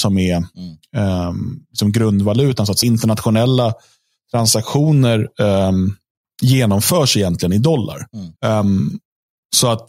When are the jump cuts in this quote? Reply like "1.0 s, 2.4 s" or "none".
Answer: 2.8 s, 6.2 s, 8.4 s